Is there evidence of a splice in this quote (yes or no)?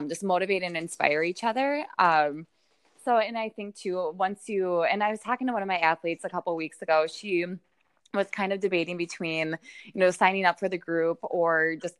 no